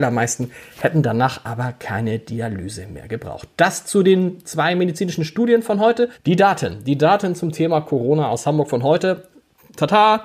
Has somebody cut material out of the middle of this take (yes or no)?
yes